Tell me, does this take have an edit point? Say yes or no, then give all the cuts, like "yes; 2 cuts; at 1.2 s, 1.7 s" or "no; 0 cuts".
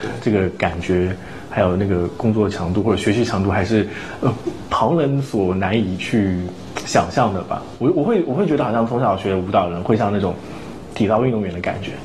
no; 0 cuts